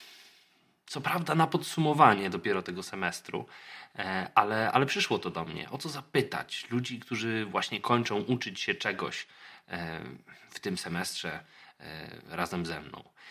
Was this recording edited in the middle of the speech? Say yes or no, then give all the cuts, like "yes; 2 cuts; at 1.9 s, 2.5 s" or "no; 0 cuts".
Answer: no; 0 cuts